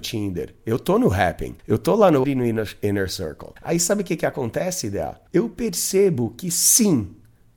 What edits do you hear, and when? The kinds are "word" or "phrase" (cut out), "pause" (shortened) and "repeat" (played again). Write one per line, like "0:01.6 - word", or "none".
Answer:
0:01.6 - pause
0:02.2 - phrase
0:03.6 - pause
0:05.3 - pause